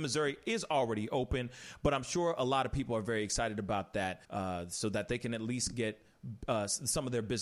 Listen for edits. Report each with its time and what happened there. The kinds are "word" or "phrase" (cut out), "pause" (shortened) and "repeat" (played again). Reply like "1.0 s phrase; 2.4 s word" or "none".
4.2 s pause